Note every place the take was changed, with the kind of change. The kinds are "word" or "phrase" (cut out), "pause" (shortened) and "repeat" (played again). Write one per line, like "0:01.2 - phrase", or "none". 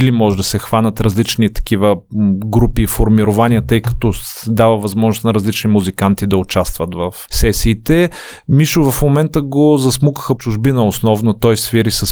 0:07.3 - word
0:10.4 - word